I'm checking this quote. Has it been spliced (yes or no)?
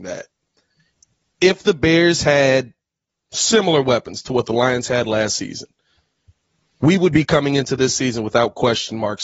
no